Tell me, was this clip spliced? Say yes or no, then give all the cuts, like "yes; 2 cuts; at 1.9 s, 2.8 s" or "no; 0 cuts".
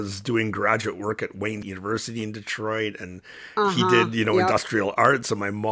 yes; 1 cut; at 1.6 s